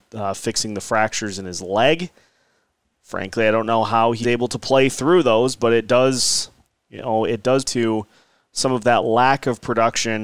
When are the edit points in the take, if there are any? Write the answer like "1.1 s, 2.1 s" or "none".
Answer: 4.2 s, 7.6 s

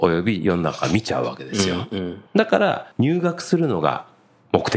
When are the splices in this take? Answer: 2.3 s, 2.9 s

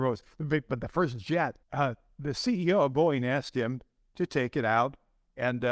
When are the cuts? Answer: 1.6 s

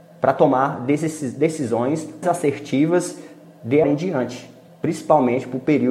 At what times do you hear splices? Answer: 2.2 s, 3.8 s, 4.7 s

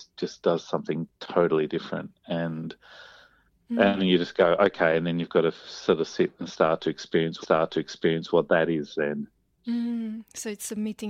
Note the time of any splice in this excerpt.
1.1 s, 7.4 s

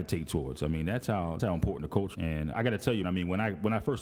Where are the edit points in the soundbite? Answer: 1.4 s, 2.1 s, 2.5 s, 3.0 s

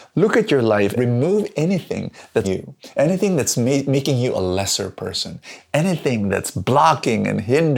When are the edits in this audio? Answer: 1.0 s, 2.4 s

